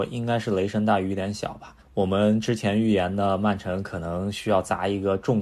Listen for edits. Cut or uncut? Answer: cut